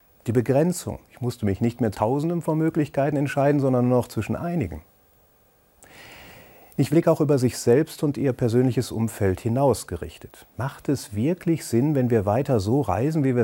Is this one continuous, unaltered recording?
no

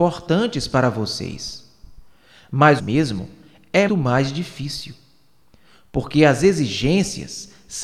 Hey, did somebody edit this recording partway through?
yes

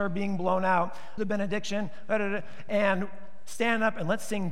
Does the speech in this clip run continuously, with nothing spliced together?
no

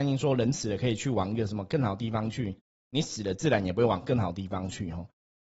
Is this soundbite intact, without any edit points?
yes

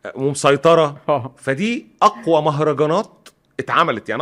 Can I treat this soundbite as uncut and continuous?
yes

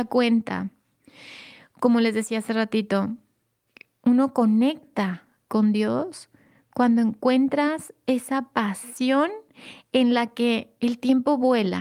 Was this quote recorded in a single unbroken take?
yes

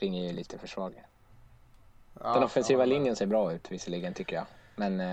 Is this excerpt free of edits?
yes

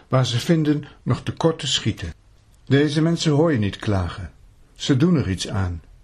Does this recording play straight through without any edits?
yes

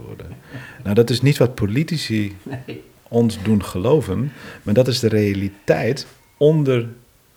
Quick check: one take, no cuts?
yes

